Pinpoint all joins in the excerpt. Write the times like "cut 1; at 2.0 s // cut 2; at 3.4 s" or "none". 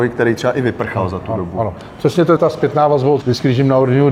cut 1; at 2.4 s // cut 2; at 3.2 s